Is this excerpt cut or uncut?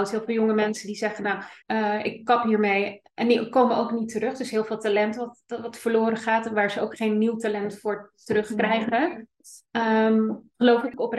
cut